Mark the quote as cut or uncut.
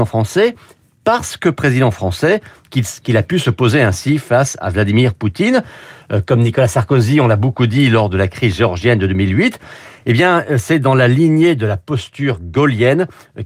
uncut